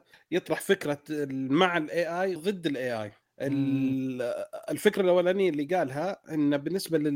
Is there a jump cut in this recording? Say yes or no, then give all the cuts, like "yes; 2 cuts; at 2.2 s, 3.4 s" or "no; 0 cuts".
yes; 1 cut; at 2.4 s